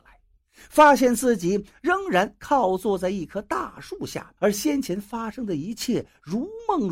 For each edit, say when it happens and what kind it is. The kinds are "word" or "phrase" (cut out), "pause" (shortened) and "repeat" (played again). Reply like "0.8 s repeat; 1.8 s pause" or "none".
4.4 s pause